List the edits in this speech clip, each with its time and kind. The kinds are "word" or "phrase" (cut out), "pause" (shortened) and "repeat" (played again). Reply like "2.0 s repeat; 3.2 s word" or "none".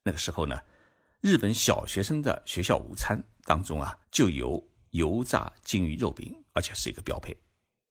4.0 s pause